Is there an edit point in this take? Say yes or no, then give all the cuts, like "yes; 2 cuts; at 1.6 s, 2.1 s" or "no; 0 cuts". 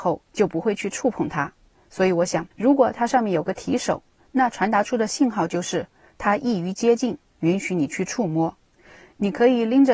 yes; 1 cut; at 2.5 s